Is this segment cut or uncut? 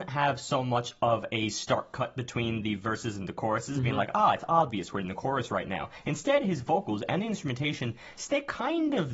uncut